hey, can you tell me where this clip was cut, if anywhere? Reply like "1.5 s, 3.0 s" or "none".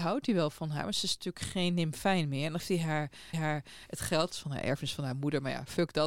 2.6 s, 3.3 s, 4.3 s